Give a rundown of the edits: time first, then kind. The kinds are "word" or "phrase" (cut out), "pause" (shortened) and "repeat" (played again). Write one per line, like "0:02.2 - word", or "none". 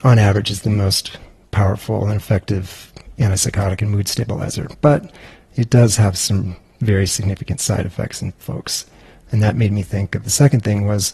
none